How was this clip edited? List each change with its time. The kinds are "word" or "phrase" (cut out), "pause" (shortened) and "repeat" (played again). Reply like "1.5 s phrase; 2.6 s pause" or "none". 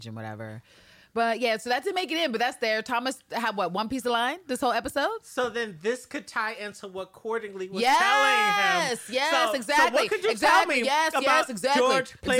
none